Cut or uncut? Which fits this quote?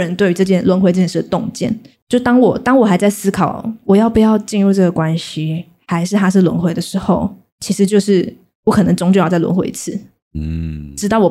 uncut